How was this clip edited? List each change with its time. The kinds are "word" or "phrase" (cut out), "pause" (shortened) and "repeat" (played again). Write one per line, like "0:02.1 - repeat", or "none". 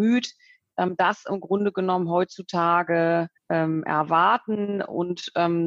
0:03.4 - pause